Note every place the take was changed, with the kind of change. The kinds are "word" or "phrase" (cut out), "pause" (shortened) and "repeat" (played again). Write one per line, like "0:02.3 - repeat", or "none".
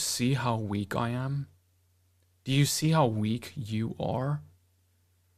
none